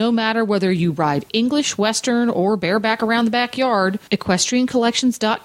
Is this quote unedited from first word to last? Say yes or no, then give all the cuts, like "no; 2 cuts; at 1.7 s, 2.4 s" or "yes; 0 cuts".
no; 1 cut; at 4.1 s